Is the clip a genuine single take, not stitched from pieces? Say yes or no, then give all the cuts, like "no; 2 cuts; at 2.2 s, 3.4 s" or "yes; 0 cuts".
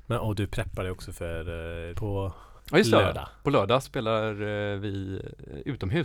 no; 3 cuts; at 1.9 s, 2.6 s, 3.8 s